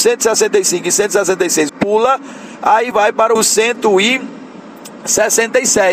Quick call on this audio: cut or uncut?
cut